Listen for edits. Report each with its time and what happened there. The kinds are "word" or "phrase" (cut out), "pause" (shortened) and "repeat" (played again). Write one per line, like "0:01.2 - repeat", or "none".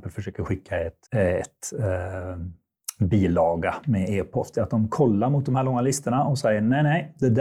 0:01.1 - pause